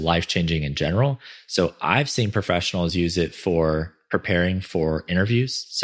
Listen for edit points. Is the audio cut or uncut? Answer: uncut